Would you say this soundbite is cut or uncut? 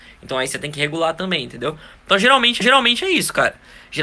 cut